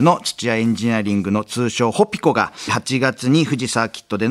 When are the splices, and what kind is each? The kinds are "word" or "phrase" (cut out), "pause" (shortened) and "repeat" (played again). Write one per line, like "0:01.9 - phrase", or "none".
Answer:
0:02.7 - phrase